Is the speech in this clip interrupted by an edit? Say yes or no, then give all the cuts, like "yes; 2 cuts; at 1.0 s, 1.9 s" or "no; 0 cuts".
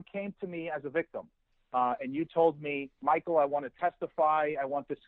no; 0 cuts